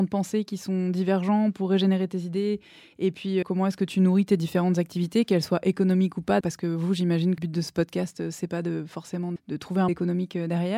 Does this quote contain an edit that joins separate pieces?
yes; 5 cuts; at 3.4 s, 6.4 s, 7.4 s, 9.4 s, 9.9 s

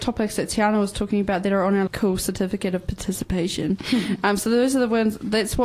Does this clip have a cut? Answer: yes; 1 cut; at 1.9 s

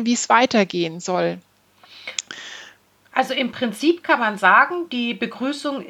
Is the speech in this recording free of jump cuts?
yes; 0 cuts

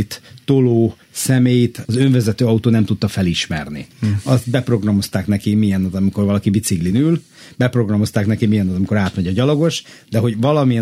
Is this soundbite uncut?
yes; 0 cuts

